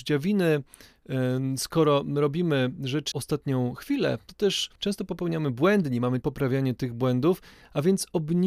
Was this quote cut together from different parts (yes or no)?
yes